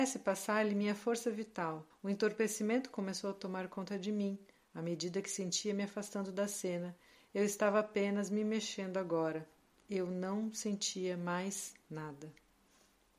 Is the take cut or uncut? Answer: cut